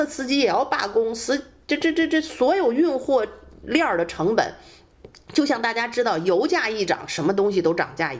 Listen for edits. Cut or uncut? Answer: uncut